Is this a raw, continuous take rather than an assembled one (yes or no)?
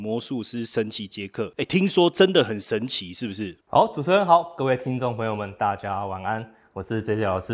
no